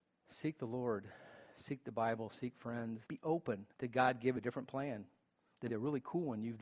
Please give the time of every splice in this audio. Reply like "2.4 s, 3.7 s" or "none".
3.1 s, 3.7 s, 4.4 s, 5.7 s